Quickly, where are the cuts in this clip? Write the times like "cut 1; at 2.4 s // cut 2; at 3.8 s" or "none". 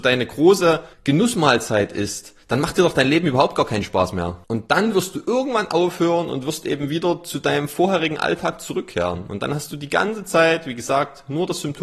cut 1; at 0.9 s // cut 2; at 4.4 s